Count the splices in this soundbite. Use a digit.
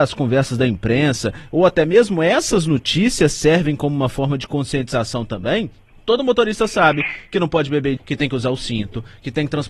1